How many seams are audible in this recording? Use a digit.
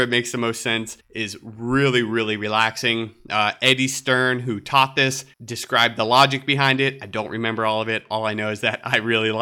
2